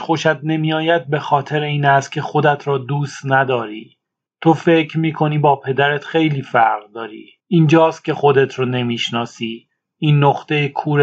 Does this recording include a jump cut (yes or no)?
yes